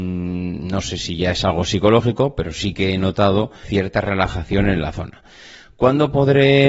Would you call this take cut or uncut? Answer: cut